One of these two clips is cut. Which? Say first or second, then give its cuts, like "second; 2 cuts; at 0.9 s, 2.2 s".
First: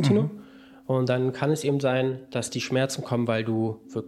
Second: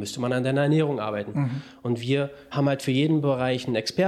second; 1 cut; at 2.5 s